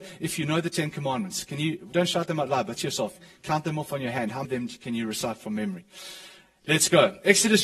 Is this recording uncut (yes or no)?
no